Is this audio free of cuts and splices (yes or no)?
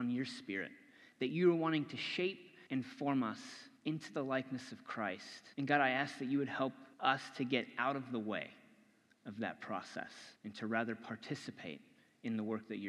no